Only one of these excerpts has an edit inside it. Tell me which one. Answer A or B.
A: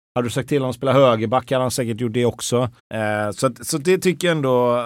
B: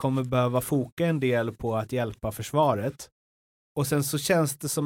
A